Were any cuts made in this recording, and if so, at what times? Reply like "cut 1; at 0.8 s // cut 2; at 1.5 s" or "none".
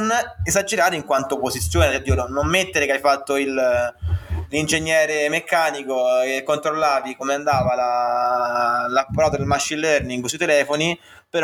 none